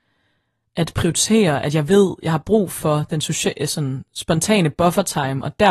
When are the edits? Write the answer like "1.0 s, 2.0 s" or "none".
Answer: none